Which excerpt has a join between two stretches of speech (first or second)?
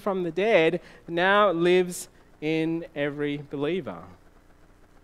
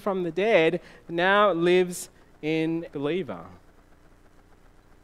second